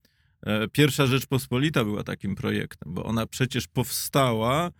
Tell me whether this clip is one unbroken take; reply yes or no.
yes